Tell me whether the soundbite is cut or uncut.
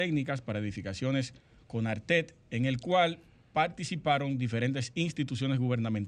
uncut